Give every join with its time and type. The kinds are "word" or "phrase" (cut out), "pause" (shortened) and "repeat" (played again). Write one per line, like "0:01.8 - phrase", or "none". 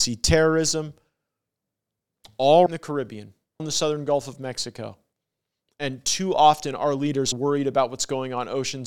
0:02.7 - word
0:03.6 - word
0:07.3 - word

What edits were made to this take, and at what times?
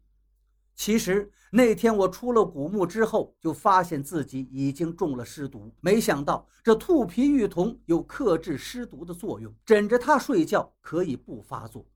0:05.8 - pause
0:09.6 - pause

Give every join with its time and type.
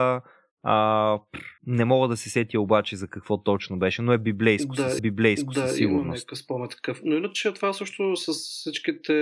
0:01.6 - pause
0:05.0 - repeat

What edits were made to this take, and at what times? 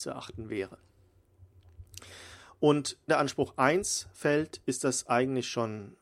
0:03.1 - word

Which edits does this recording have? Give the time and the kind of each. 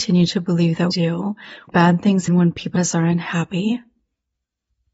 0:00.9 - word
0:01.7 - word
0:02.3 - word
0:02.8 - word

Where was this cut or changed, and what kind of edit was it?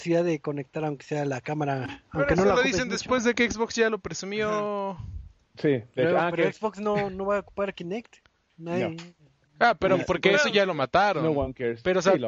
none

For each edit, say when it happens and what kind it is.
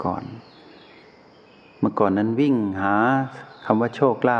none

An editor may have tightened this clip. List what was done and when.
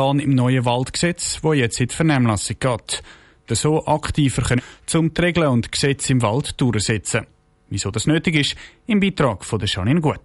0:03.5 - phrase
0:04.6 - word

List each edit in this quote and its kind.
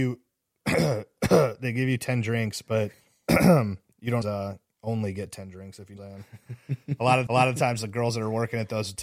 0:03.0 - pause
0:04.2 - word
0:06.0 - phrase
0:07.3 - repeat

